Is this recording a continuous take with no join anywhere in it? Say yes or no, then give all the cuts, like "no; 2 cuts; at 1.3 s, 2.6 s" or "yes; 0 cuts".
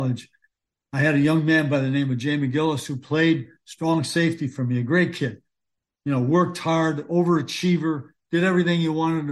yes; 0 cuts